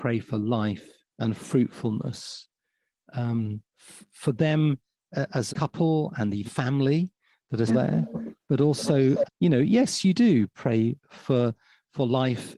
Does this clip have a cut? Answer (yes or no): yes